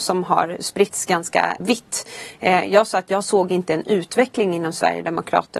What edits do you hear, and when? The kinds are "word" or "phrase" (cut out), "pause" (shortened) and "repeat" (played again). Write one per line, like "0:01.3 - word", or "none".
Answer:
0:01.6 - word